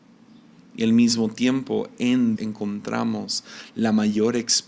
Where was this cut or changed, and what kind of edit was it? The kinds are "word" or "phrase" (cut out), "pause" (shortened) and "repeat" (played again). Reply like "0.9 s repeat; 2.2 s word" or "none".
2.4 s word